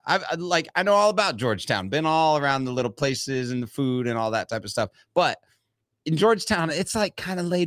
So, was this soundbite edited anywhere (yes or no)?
no